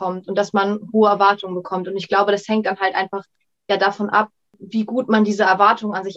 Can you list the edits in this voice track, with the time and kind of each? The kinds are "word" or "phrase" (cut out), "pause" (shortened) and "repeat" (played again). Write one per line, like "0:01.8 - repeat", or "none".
none